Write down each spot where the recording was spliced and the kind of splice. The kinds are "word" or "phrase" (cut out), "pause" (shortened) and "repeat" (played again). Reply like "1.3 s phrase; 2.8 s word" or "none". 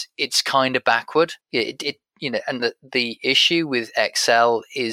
1.4 s pause; 2.6 s word